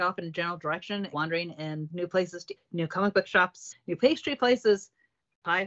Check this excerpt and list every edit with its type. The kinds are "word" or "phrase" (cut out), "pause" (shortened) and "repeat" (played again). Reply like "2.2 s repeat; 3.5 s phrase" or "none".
1.1 s word; 1.9 s word; 2.6 s word; 3.7 s word